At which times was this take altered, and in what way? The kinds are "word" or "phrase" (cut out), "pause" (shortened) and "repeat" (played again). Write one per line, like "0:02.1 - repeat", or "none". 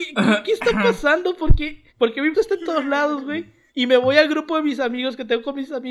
0:01.9 - pause
0:02.3 - word
0:03.7 - pause